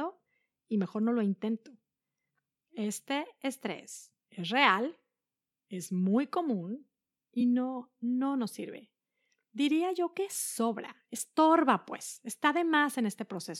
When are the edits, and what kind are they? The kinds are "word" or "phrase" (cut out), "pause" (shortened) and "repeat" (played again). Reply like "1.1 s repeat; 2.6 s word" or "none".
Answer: none